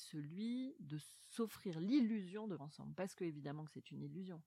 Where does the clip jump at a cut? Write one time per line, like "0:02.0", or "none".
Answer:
0:02.6